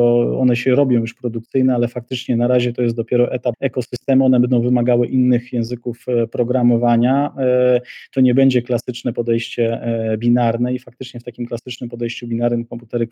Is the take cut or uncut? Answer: cut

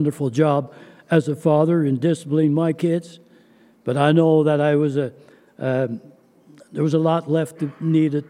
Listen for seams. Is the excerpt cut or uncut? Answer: uncut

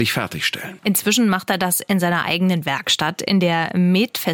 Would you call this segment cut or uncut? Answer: uncut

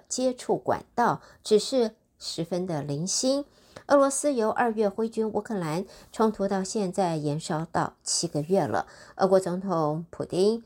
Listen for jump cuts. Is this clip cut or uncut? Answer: uncut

